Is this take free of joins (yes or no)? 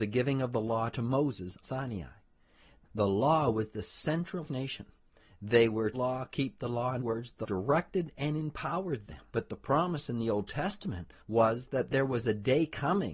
no